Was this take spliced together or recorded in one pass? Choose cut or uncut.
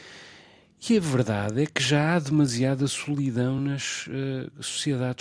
uncut